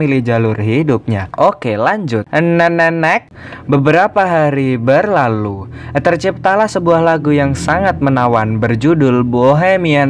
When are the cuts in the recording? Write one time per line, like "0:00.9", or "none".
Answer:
none